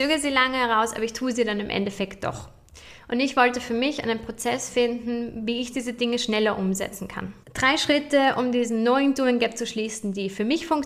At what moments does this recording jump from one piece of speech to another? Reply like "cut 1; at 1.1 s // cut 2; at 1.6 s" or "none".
cut 1; at 7.4 s